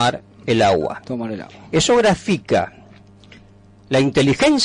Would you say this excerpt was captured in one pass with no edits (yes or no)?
yes